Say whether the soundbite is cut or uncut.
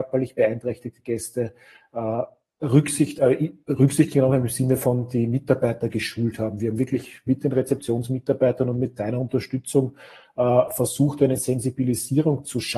uncut